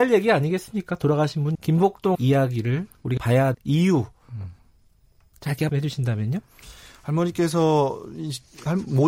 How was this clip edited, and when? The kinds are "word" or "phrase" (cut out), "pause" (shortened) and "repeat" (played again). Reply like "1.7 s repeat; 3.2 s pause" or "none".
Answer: 1.5 s word; 2.1 s word; 3.2 s word; 3.5 s word; 5.7 s word